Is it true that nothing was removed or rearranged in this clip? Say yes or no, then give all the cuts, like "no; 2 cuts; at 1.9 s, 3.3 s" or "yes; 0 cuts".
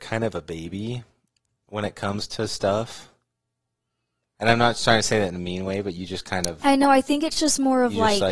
yes; 0 cuts